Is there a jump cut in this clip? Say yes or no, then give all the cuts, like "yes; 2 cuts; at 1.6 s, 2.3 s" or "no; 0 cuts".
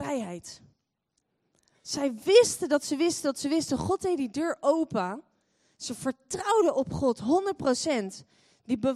no; 0 cuts